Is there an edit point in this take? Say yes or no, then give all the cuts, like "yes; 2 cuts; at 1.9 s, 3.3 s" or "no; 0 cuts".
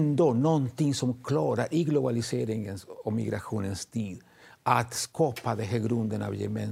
no; 0 cuts